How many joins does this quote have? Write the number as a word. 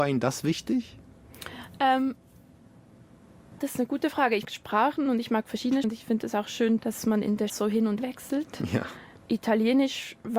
six